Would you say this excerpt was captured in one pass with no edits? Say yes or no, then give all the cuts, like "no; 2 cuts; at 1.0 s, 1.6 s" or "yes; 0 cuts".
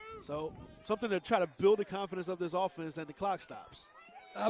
yes; 0 cuts